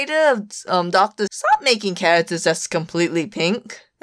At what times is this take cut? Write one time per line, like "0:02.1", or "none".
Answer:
0:01.3

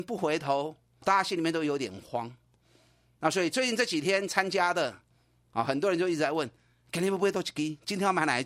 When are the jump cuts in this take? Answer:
0:01.0

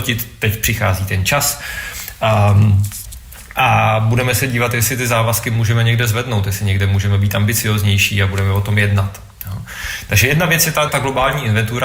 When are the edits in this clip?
0:10.9

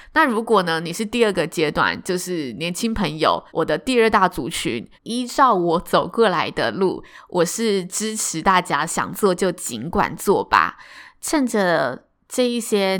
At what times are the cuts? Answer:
0:03.5
0:04.9

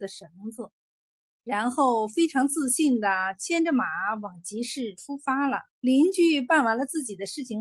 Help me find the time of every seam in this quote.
0:05.7

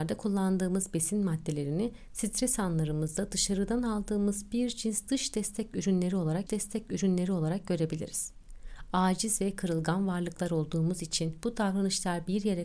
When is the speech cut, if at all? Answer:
0:06.5

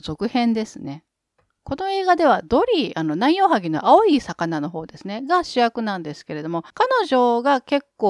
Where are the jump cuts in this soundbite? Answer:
0:06.7

